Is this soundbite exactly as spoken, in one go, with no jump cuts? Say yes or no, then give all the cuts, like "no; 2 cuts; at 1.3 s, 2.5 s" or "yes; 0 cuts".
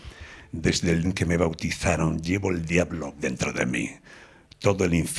no; 2 cuts; at 1.0 s, 3.2 s